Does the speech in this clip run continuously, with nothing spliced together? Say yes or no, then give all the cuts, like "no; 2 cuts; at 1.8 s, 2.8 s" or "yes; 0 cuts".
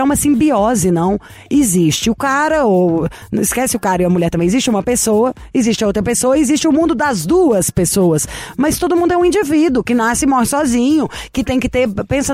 yes; 0 cuts